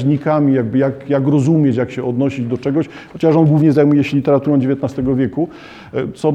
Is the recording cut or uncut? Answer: uncut